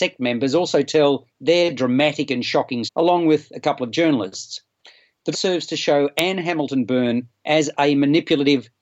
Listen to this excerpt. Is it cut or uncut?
cut